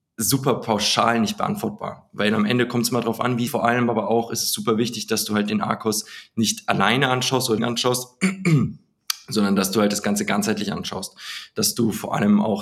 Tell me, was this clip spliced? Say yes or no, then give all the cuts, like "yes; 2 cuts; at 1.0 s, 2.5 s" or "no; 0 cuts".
yes; 2 cuts; at 3.5 s, 7.6 s